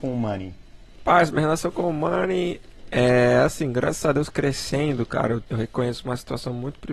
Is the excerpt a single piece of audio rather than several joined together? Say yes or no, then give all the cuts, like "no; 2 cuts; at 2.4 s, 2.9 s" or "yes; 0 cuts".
yes; 0 cuts